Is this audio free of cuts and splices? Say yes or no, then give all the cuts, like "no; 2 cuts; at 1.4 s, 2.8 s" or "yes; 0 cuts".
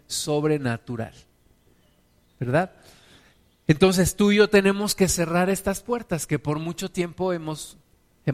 yes; 0 cuts